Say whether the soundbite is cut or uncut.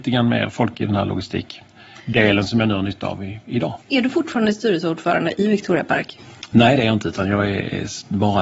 cut